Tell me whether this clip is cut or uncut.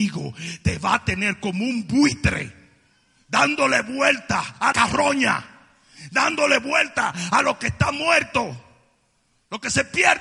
cut